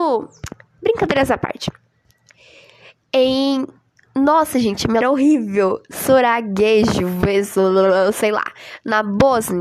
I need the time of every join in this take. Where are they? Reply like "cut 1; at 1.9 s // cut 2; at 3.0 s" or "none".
cut 1; at 5.0 s